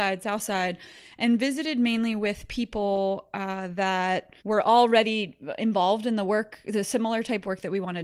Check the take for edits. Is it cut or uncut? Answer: cut